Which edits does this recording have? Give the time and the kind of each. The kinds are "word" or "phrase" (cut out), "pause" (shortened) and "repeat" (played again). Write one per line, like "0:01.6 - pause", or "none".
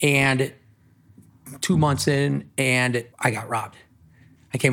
0:03.1 - pause